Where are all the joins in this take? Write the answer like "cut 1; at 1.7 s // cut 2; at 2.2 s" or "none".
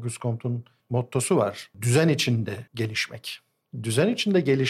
cut 1; at 2.7 s